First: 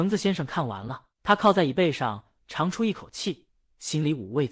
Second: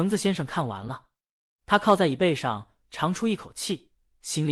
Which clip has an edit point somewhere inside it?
first; 1 cut; at 1.1 s

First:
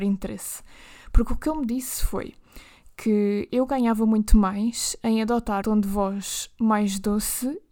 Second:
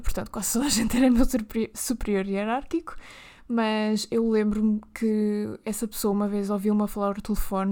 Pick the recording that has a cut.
first; 1 cut; at 5.6 s

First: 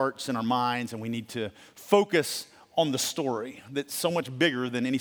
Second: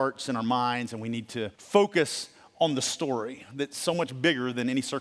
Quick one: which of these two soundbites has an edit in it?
second; 1 cut; at 1.5 s

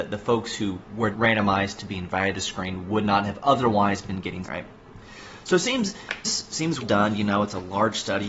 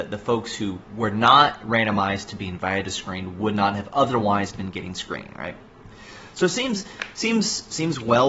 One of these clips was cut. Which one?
first; 4 cuts; at 1.1 s, 4.4 s, 6.2 s, 6.8 s

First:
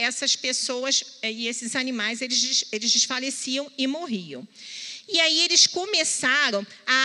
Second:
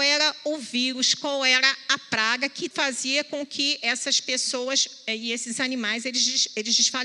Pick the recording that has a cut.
second; 1 cut; at 2.7 s

